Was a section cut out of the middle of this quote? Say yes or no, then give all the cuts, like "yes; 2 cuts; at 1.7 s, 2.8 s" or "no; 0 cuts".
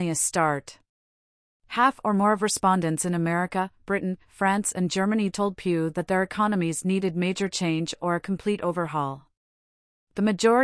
no; 0 cuts